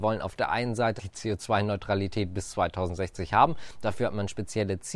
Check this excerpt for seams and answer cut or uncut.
cut